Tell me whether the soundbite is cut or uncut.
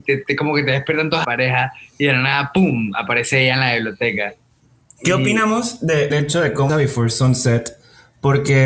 cut